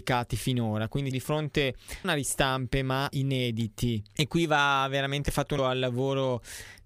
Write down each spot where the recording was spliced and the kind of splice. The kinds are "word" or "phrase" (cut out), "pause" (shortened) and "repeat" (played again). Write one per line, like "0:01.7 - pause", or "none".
0:01.1 - word
0:02.0 - word
0:03.1 - word
0:05.6 - word